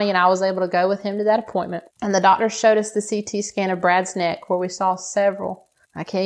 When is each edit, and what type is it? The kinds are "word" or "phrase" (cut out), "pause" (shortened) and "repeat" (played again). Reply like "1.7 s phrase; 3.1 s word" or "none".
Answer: 1.9 s pause